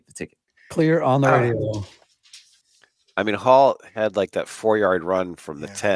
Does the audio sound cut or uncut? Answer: uncut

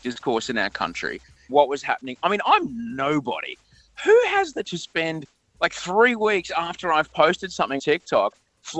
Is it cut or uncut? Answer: cut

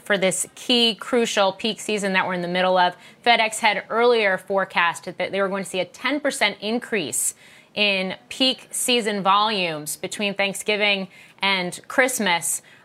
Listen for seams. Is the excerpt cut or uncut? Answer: uncut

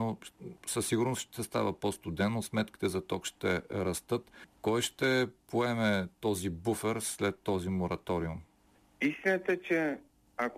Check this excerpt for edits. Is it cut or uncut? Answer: uncut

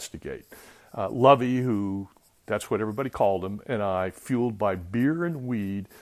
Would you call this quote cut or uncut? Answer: uncut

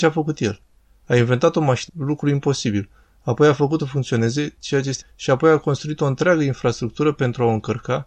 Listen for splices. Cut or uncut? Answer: cut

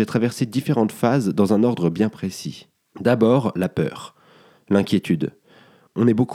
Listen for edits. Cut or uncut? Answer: uncut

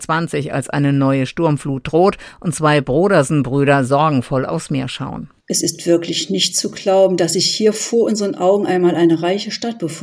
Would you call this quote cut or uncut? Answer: uncut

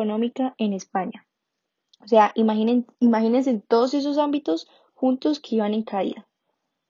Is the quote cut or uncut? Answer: uncut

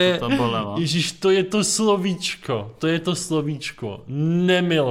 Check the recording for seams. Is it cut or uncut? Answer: uncut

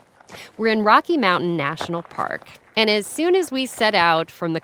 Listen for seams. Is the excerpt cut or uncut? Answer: uncut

